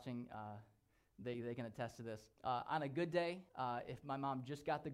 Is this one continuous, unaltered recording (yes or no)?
no